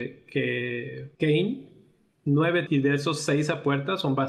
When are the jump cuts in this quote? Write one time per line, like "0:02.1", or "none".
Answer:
0:01.1
0:02.7